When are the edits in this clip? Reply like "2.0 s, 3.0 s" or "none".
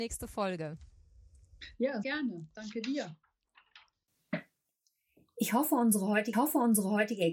2.0 s, 6.3 s